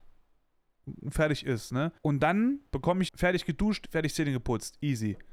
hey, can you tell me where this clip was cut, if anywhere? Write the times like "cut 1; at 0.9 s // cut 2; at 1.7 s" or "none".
cut 1; at 2.0 s // cut 2; at 2.7 s // cut 3; at 3.1 s